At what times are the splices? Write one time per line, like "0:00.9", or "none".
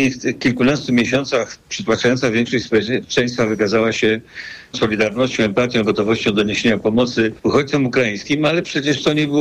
0:01.6
0:04.7
0:07.4